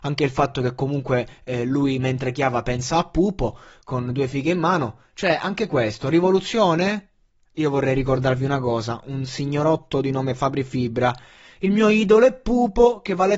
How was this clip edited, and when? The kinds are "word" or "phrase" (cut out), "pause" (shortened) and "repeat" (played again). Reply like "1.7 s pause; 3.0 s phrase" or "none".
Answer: none